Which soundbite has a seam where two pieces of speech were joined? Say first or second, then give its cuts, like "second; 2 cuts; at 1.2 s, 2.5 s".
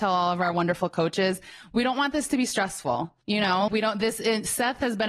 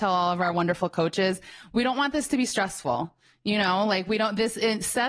first; 2 cuts; at 3.2 s, 3.7 s